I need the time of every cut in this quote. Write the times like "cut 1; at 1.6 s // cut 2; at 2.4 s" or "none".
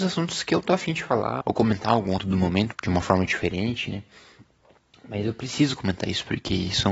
cut 1; at 1.4 s // cut 2; at 2.2 s // cut 3; at 2.7 s